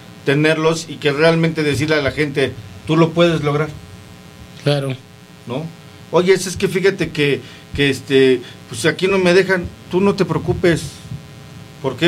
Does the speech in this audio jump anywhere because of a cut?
no; 0 cuts

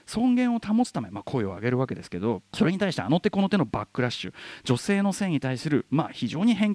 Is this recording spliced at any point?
yes; 1 cut; at 2.5 s

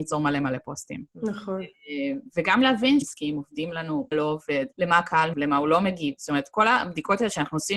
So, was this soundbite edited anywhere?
yes; 5 cuts; at 1.1 s, 3.0 s, 4.1 s, 4.7 s, 5.3 s

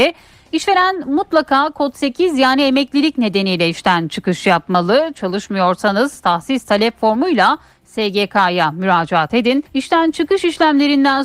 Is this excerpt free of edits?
no; 1 cut; at 9.7 s

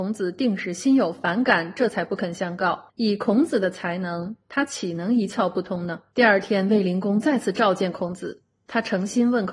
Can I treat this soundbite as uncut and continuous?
no; 2 cuts; at 2.9 s, 6.1 s

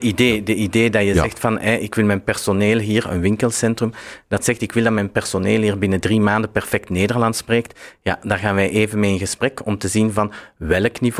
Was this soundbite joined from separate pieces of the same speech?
no; 0 cuts

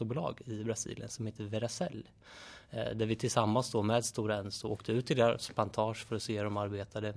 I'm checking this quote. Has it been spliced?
no; 0 cuts

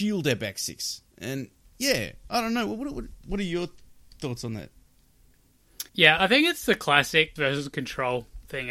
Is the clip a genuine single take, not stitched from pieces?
no; 3 cuts; at 1.6 s, 5.9 s, 7.4 s

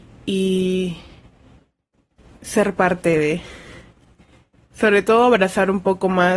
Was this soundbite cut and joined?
no; 0 cuts

